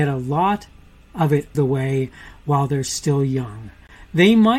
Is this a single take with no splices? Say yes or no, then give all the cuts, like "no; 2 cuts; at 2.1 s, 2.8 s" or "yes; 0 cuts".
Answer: no; 1 cut; at 1.5 s